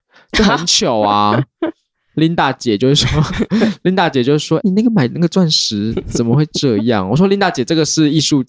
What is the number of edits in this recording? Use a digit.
1